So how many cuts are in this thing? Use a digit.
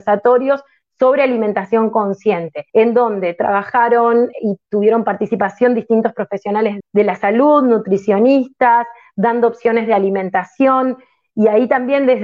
3